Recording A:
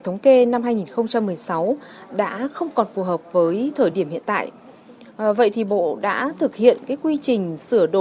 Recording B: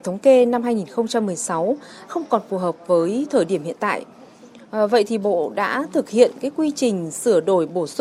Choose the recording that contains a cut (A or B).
B